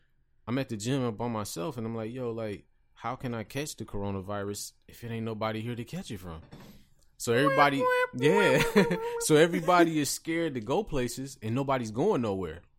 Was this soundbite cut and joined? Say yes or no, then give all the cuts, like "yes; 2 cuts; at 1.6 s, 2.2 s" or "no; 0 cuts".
no; 0 cuts